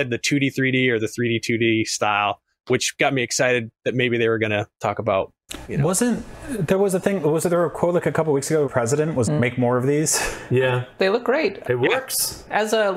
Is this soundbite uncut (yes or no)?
no